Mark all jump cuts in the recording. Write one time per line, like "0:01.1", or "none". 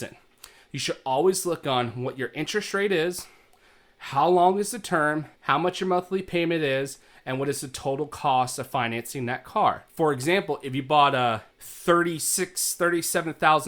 0:05.3
0:09.9
0:11.5